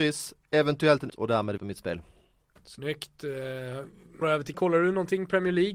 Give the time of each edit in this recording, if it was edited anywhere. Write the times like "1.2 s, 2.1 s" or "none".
1.1 s, 1.6 s, 4.2 s, 4.5 s